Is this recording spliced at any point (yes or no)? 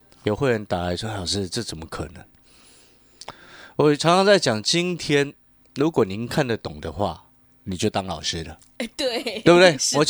no